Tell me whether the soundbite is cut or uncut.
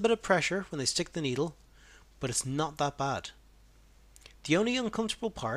uncut